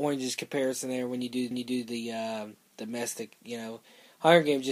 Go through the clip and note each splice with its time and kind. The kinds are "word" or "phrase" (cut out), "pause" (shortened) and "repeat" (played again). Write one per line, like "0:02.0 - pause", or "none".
0:01.5 - repeat

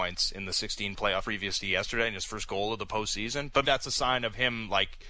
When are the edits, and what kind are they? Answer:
0:01.2 - word
0:03.6 - word

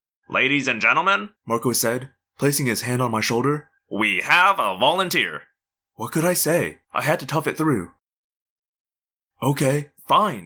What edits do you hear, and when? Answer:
0:01.4 - pause
0:03.8 - pause
0:05.8 - pause
0:06.8 - pause

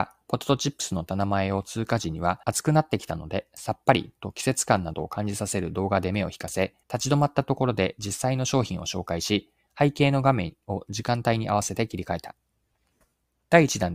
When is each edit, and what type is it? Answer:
0:02.4 - pause
0:06.8 - pause

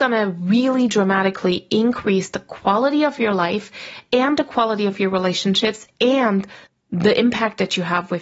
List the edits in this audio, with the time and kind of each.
0:06.7 - pause

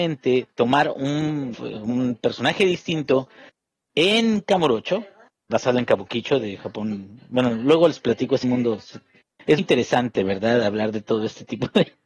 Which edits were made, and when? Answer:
0:01.5 - word
0:05.5 - word
0:08.4 - phrase
0:09.6 - word

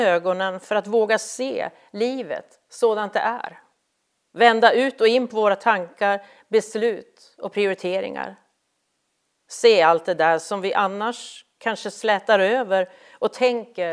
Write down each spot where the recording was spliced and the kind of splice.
none

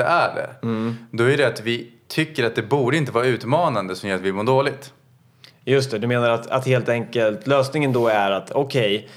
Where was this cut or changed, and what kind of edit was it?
none

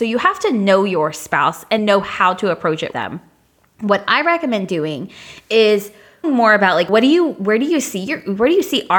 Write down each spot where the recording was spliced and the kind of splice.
0:01.8 - word
0:02.9 - word
0:06.2 - word
0:06.9 - word

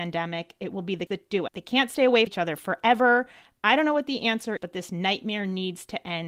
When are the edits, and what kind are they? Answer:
0:01.1 - word
0:01.5 - word
0:02.3 - word
0:04.6 - word

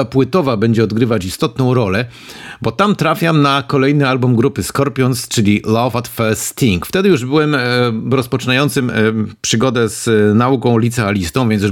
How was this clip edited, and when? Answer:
none

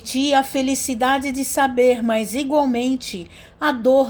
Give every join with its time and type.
none

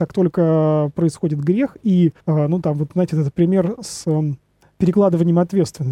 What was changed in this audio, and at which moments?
0:02.2 - pause
0:04.6 - pause

